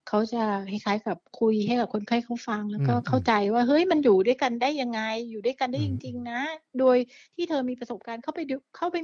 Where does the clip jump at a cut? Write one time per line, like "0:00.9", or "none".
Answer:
none